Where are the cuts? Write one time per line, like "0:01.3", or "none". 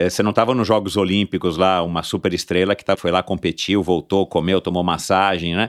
0:03.0